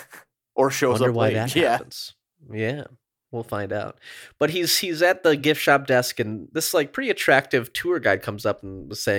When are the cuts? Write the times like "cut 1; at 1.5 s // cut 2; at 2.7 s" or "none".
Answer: none